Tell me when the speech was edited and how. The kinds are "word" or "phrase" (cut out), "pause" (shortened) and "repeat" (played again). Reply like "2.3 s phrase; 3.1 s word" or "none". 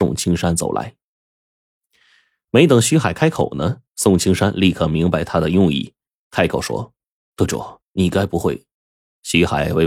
7.8 s pause; 8.7 s pause